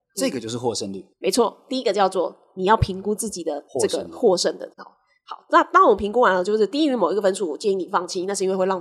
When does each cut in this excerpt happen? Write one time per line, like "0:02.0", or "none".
0:01.1
0:03.7
0:04.7